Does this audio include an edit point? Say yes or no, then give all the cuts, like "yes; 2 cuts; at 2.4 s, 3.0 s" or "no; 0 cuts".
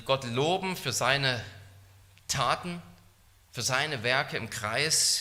no; 0 cuts